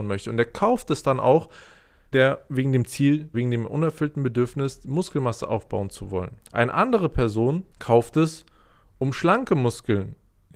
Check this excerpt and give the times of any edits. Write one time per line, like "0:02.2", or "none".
0:02.1
0:03.3
0:06.4
0:07.7